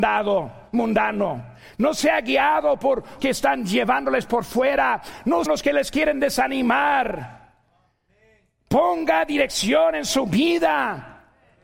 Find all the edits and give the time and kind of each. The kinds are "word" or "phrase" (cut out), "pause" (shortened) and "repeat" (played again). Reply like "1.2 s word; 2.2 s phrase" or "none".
3.2 s word; 5.5 s word